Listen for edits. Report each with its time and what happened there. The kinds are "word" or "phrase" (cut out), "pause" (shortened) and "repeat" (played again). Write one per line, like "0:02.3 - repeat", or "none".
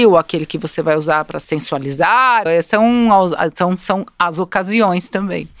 0:02.5 - word

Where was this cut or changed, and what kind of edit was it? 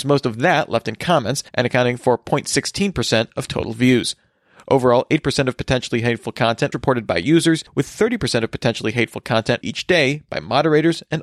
0:01.5 - pause
0:06.7 - word
0:07.7 - pause
0:09.6 - word

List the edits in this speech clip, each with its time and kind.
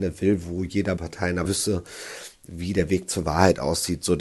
0:01.0 - phrase
0:01.4 - word

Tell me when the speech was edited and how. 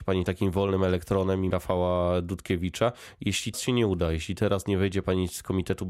0:01.5 - phrase
0:03.5 - word

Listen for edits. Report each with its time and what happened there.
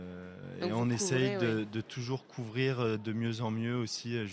none

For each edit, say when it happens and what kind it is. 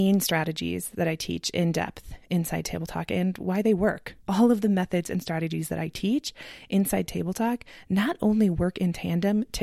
0:04.2 - pause

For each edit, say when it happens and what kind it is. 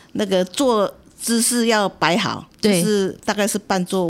none

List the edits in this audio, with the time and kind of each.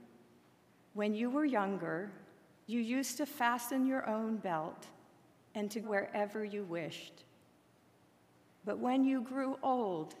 0:05.8 - word

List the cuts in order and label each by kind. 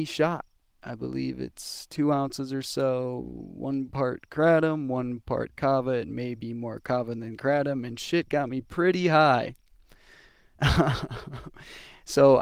none

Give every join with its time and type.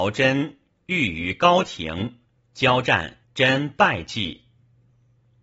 0:02.4 - pause
0:03.2 - pause

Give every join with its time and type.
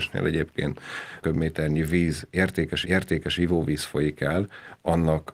0:01.2 - word
0:02.8 - repeat

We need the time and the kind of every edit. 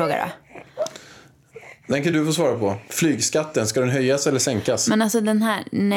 none

